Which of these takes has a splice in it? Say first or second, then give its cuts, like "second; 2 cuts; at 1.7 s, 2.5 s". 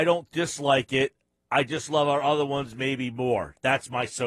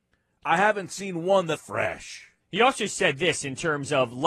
second; 2 cuts; at 1.5 s, 2.4 s